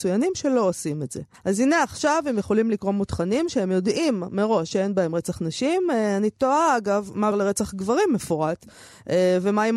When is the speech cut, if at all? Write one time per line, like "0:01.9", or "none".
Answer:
0:01.3
0:07.3

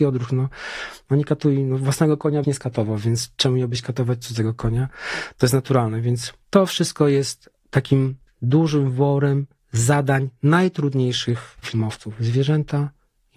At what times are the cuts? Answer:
0:02.4
0:06.4
0:11.6

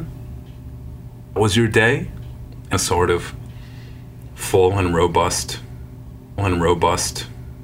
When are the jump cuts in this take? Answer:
0:01.4
0:02.7
0:06.4

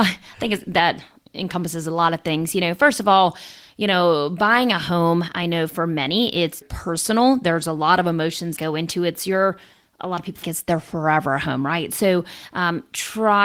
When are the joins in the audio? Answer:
0:06.6
0:08.6
0:10.4

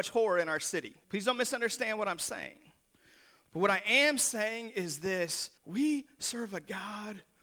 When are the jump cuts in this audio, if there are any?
0:01.0
0:05.6

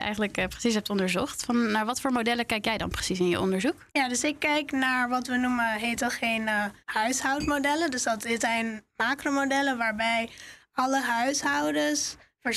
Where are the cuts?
0:03.9
0:06.8

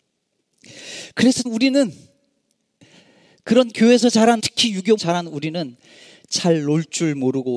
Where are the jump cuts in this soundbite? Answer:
0:01.5
0:04.4
0:05.0

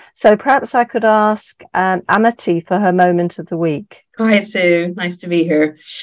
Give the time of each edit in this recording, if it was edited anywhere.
0:04.1

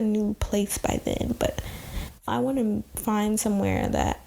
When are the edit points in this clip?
0:02.3

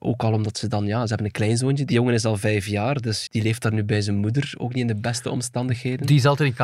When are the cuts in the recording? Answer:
0:03.3

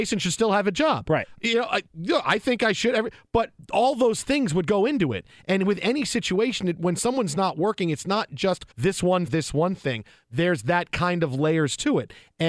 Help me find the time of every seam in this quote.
0:08.7
0:09.3

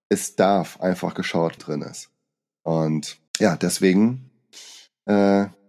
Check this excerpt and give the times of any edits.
0:01.6
0:03.3

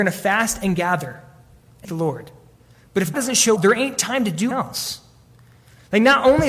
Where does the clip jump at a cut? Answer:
0:01.8
0:03.1
0:03.6
0:04.5

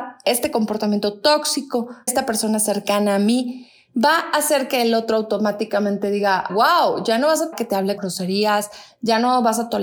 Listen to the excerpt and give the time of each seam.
0:02.1
0:06.5
0:07.5
0:08.0

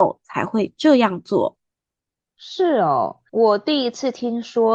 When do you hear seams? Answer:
0:01.6
0:03.3

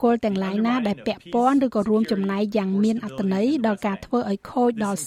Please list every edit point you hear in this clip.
none

